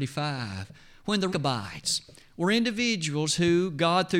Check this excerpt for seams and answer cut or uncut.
cut